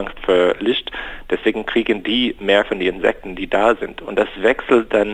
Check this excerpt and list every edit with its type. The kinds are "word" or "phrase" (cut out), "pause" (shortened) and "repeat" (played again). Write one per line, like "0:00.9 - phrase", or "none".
none